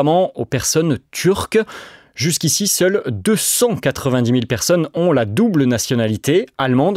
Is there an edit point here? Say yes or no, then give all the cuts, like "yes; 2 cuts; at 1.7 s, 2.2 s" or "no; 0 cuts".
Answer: no; 0 cuts